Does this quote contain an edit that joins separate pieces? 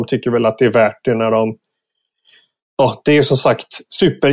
no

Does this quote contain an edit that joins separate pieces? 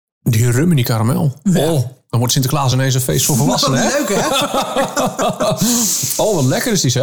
no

